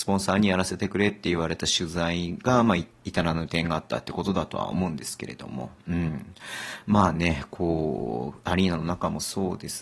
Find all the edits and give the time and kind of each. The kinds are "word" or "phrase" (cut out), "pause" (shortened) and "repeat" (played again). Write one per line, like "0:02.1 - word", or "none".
none